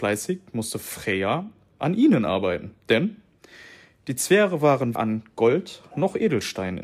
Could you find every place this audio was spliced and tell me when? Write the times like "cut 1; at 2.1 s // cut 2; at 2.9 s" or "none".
cut 1; at 2.8 s // cut 2; at 5.0 s